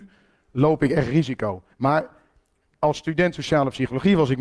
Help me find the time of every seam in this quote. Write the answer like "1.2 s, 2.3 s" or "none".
1.7 s